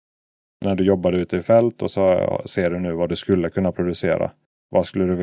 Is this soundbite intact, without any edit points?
yes; 0 cuts

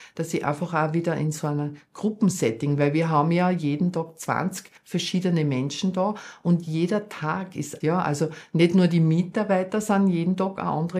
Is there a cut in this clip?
yes; 2 cuts; at 4.8 s, 7.8 s

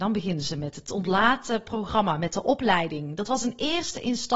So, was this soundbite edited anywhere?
no; 0 cuts

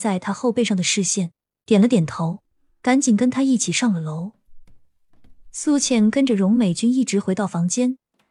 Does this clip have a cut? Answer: no; 0 cuts

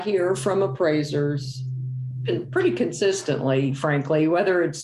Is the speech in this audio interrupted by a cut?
no; 0 cuts

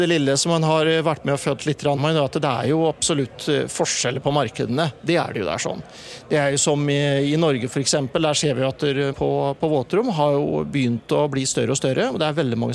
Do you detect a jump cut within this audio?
yes; 2 cuts; at 2.0 s, 9.1 s

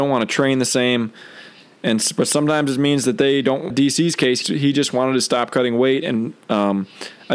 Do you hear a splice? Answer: yes; 2 cuts; at 3.7 s, 4.4 s

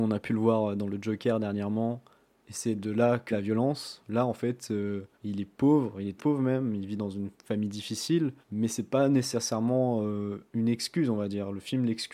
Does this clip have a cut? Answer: yes; 6 cuts; at 3.3 s, 5.1 s, 6.2 s, 7.4 s, 8.4 s, 10.5 s

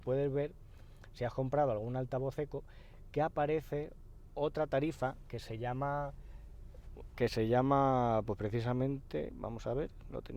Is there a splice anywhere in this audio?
no; 0 cuts

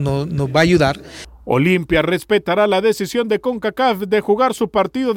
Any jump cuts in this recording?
no; 0 cuts

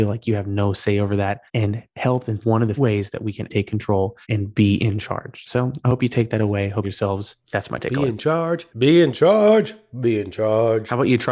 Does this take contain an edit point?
yes; 7 cuts; at 1.5 s, 2.4 s, 2.8 s, 3.5 s, 4.2 s, 6.8 s, 8.7 s

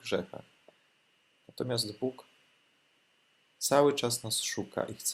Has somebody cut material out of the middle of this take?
no; 0 cuts

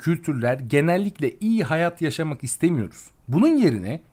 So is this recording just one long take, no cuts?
yes; 0 cuts

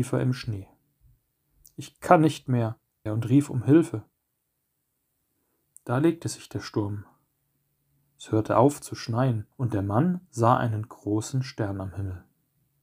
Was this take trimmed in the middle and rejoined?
yes; 2 cuts; at 3.1 s, 9.5 s

